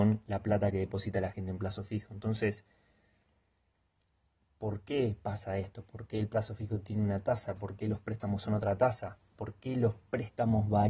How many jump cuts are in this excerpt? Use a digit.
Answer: 0